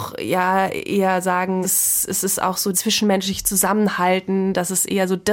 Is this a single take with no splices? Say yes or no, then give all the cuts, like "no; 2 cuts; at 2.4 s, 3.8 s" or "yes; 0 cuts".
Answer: no; 2 cuts; at 1.6 s, 2.7 s